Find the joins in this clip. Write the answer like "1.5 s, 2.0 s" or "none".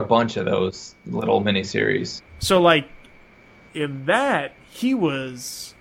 none